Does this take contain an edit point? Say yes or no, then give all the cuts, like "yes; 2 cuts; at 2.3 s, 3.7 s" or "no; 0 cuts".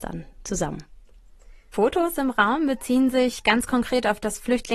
no; 0 cuts